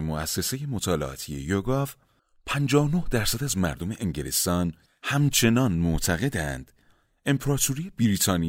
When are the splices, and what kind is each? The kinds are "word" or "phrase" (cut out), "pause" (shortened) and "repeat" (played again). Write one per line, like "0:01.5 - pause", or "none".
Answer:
none